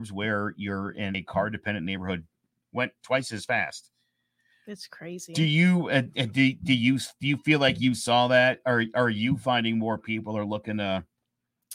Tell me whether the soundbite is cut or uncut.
uncut